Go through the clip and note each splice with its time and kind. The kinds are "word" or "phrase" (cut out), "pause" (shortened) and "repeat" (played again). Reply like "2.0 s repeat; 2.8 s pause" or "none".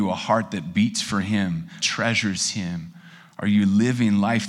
1.8 s phrase